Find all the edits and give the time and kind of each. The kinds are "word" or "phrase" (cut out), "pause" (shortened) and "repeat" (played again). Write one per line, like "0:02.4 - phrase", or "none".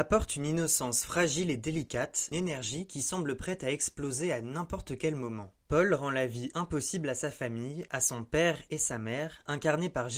0:02.3 - phrase